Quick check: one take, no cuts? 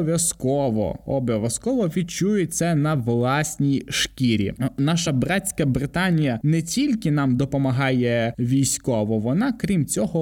yes; 0 cuts

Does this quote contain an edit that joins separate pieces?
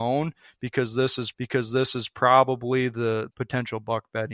yes; 2 cuts; at 1.3 s, 3.3 s

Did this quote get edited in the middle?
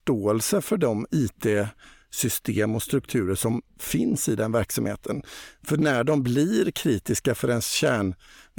no; 0 cuts

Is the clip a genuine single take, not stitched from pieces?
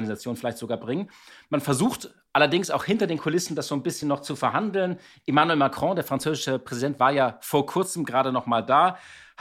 yes; 0 cuts

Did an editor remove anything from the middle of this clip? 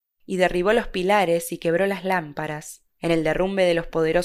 yes; 1 cut; at 2.9 s

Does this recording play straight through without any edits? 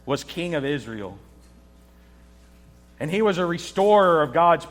yes; 0 cuts

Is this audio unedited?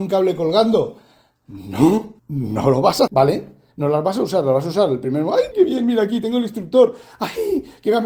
no; 3 cuts; at 2.2 s, 3.1 s, 5.5 s

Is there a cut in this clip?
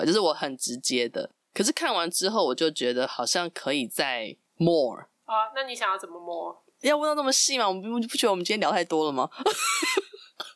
no; 0 cuts

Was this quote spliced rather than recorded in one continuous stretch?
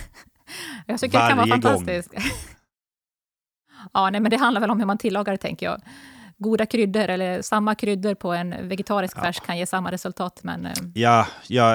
no; 0 cuts

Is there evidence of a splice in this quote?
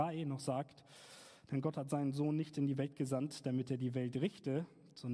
no; 0 cuts

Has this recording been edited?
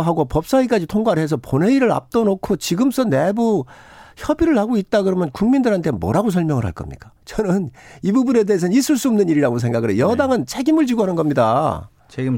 yes; 1 cut; at 7.2 s

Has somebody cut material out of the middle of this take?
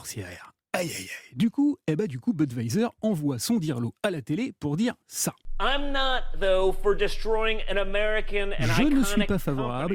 no; 0 cuts

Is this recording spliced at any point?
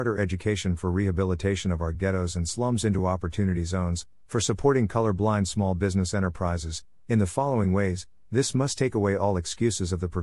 no; 0 cuts

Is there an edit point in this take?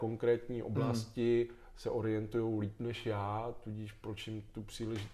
no; 0 cuts

